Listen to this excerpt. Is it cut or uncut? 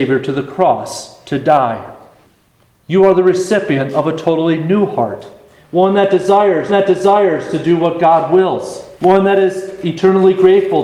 cut